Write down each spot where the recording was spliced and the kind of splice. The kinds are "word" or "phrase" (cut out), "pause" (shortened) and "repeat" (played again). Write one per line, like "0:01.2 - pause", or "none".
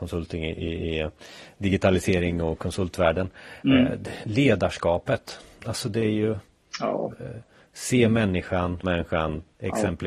0:08.8 - word